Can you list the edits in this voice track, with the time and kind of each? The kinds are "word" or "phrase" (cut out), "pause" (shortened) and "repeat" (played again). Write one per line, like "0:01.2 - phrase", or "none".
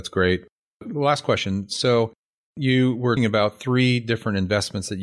0:03.2 - word